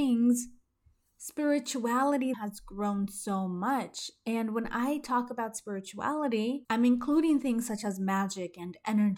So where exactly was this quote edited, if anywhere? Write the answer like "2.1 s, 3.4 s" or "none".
2.3 s

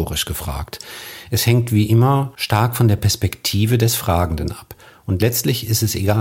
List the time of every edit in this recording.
none

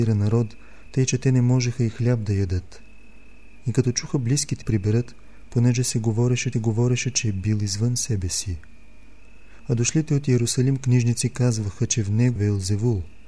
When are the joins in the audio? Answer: 4.6 s, 6.5 s, 12.4 s

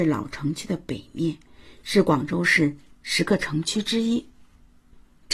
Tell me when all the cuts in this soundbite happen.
none

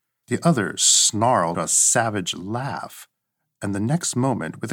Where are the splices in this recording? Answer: 1.5 s

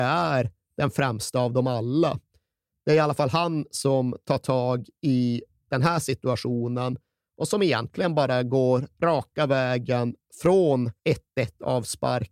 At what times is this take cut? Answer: 11.0 s

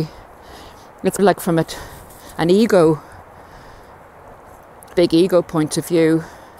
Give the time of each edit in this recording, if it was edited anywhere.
1.2 s, 4.9 s

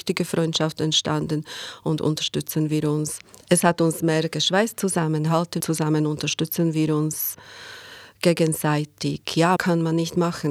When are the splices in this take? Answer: 5.6 s, 9.6 s

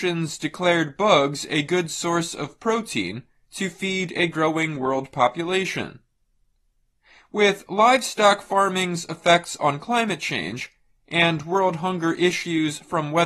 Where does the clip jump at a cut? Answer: none

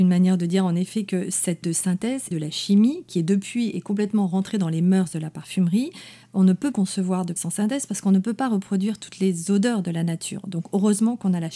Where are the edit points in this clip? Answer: 1.6 s, 2.3 s, 6.7 s, 7.4 s

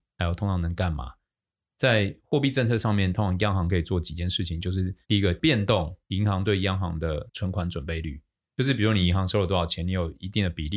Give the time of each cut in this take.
5.0 s

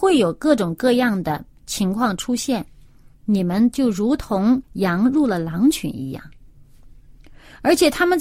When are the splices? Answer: 4.6 s

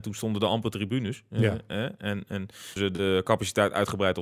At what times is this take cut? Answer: 2.8 s

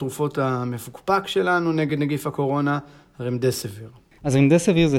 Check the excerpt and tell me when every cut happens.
none

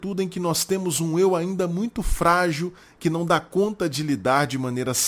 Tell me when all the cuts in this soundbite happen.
none

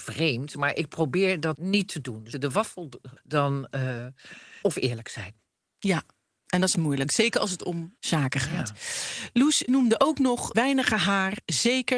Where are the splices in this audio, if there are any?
1.6 s, 2.3 s, 3.2 s, 4.6 s, 6.7 s, 8.0 s, 9.7 s, 10.5 s

